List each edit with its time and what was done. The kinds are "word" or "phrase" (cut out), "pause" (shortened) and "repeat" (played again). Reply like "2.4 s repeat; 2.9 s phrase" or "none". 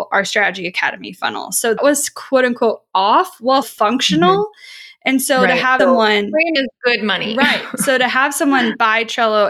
1.8 s word; 3.6 s word; 5.8 s word; 6.6 s word

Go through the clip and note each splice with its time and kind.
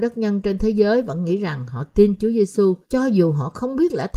2.8 s pause

